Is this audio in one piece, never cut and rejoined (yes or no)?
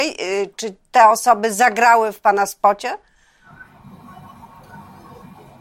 yes